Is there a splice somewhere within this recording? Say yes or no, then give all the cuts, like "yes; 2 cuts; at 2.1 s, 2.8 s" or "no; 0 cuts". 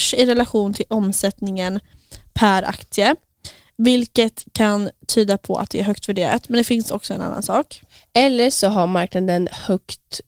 no; 0 cuts